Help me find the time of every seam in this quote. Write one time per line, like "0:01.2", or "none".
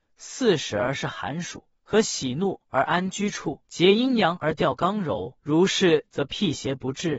0:01.8
0:03.6
0:05.4